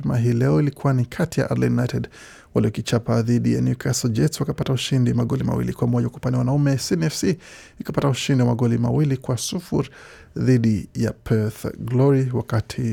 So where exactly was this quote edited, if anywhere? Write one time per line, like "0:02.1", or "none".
none